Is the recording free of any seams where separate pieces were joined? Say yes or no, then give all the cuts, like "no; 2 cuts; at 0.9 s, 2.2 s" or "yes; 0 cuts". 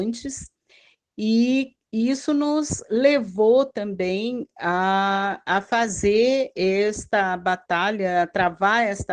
no; 1 cut; at 1.8 s